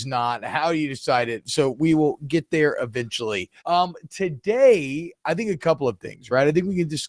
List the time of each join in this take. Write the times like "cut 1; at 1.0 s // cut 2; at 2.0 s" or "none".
cut 1; at 3.6 s